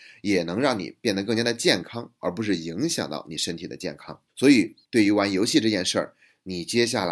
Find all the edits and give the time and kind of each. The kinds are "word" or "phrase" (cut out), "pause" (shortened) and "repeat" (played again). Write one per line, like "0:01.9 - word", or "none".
0:04.3 - pause
0:04.8 - pause